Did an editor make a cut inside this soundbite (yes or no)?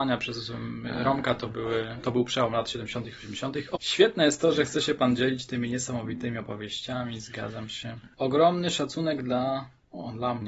no